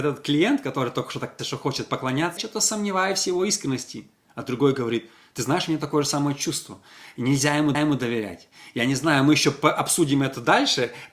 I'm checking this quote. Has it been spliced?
yes; 3 cuts; at 1.4 s, 2.4 s, 7.7 s

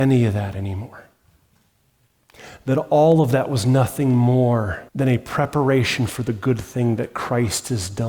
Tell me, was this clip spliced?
yes; 1 cut; at 4.9 s

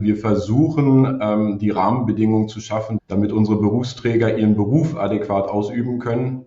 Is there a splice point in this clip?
no; 0 cuts

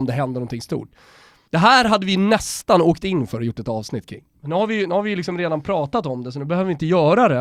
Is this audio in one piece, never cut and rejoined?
yes; 0 cuts

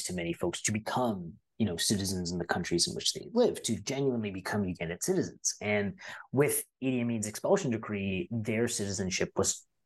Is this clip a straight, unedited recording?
yes; 0 cuts

